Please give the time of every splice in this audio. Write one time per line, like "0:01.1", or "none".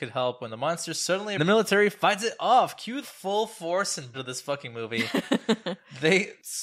0:01.4
0:03.0
0:04.1